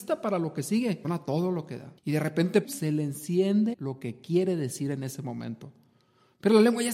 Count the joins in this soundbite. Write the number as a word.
four